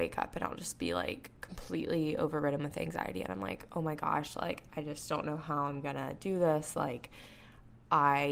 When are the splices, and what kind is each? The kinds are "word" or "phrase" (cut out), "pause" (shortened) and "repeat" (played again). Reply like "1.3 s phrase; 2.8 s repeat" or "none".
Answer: none